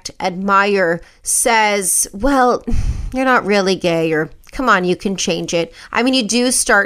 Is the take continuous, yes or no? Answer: no